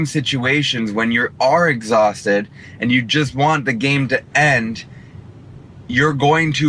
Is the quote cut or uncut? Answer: uncut